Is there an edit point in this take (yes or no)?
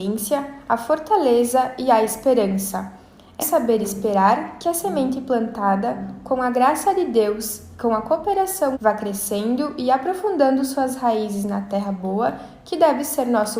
yes